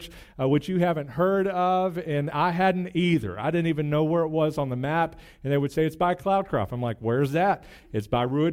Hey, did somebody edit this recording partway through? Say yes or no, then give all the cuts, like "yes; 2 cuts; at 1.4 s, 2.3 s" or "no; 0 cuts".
no; 0 cuts